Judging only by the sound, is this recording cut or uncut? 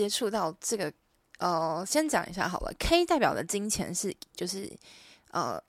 cut